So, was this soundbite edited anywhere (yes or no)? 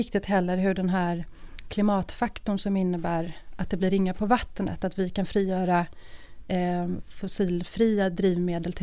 no